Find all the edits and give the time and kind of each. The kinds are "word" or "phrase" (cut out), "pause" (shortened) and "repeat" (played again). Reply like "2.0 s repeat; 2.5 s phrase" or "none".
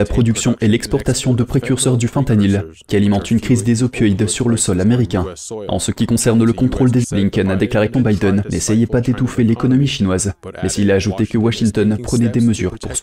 7.0 s phrase; 7.9 s word